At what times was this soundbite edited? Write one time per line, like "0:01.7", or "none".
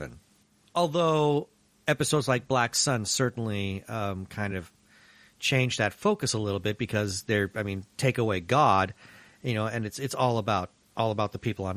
none